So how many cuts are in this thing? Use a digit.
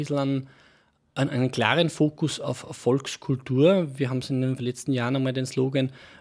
0